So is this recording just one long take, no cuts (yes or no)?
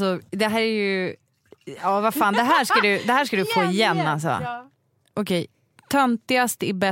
yes